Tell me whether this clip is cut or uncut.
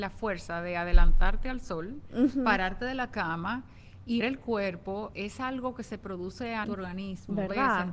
cut